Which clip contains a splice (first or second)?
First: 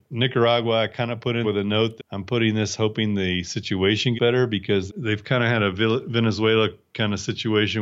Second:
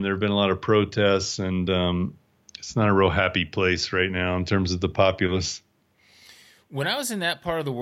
first